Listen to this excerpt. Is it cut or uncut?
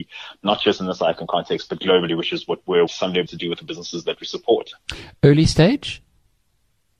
cut